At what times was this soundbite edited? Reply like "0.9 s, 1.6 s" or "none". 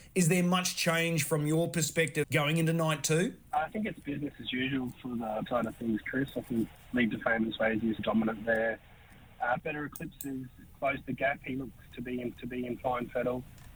2.2 s, 3.4 s, 5.5 s, 6.7 s, 8.0 s, 9.6 s, 12.3 s